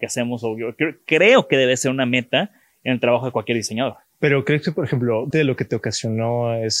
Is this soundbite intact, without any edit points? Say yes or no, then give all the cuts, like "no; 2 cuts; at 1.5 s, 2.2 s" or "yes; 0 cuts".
no; 1 cut; at 5.3 s